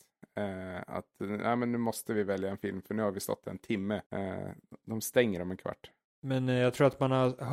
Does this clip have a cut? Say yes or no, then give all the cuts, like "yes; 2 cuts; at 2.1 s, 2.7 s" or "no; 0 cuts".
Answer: yes; 1 cut; at 4.1 s